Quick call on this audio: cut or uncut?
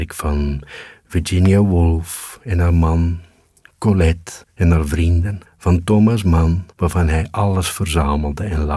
cut